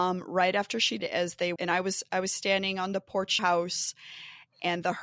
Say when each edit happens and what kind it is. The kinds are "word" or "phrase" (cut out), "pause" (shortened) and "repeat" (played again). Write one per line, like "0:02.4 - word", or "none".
0:01.0 - word
0:01.6 - word
0:03.4 - phrase